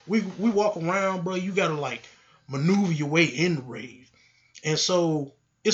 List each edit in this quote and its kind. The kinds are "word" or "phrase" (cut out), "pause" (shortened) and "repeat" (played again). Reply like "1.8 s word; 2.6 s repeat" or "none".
none